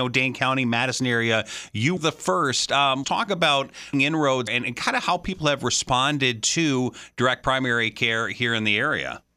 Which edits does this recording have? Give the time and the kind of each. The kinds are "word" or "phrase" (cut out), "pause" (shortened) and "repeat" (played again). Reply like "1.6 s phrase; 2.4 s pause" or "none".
2.0 s word; 3.0 s word; 3.9 s word; 4.5 s word